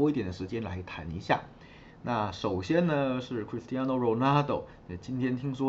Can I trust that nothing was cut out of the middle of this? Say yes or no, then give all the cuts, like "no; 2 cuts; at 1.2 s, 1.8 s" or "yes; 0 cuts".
yes; 0 cuts